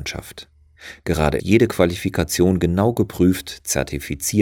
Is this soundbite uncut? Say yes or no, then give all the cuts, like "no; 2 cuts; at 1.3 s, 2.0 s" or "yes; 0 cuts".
no; 1 cut; at 1.4 s